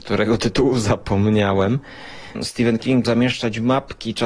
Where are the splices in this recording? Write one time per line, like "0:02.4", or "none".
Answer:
0:03.0

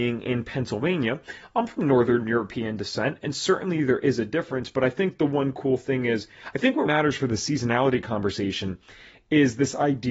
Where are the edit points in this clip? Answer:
0:06.8

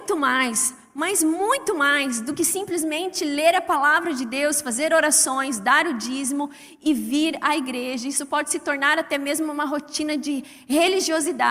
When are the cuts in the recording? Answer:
none

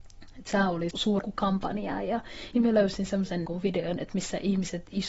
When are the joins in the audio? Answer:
0:00.9
0:01.2
0:02.5
0:03.5

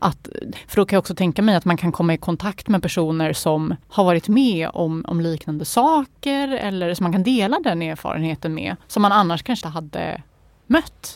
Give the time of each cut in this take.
0:03.8
0:08.8
0:09.6

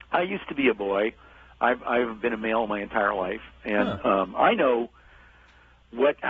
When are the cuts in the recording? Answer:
none

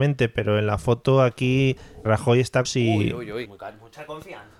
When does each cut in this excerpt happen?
0:02.0
0:02.6
0:03.4

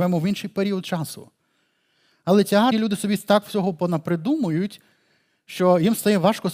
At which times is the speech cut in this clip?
0:02.7

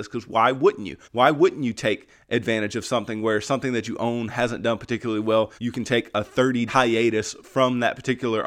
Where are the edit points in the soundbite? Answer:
0:01.0
0:05.6
0:06.7

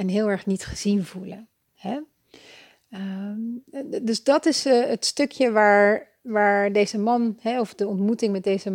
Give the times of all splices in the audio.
none

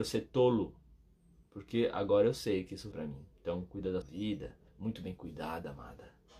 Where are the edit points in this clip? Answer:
0:02.9
0:03.3
0:04.0
0:04.7

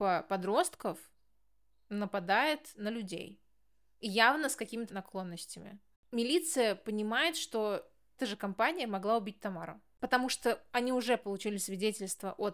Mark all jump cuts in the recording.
0:04.9
0:08.2

